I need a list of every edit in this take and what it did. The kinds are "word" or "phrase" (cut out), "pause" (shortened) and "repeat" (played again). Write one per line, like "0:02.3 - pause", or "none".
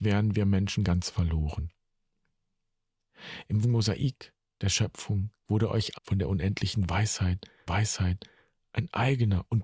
0:03.6 - word
0:05.4 - pause
0:05.9 - word
0:07.7 - repeat